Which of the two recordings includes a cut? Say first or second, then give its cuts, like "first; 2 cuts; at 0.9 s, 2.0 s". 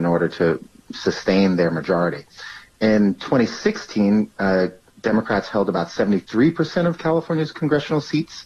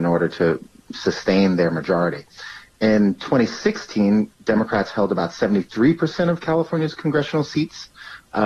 second; 1 cut; at 4.3 s